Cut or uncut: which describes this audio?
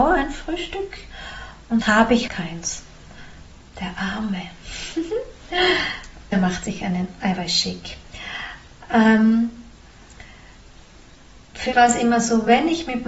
cut